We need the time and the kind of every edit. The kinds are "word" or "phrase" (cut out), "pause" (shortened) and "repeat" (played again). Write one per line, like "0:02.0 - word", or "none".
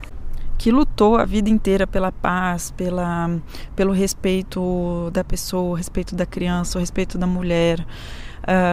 none